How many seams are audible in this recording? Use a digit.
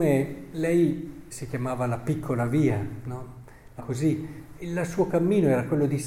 3